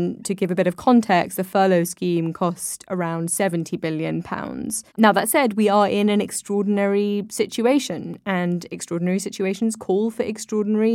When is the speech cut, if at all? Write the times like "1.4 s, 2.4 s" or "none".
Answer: 4.9 s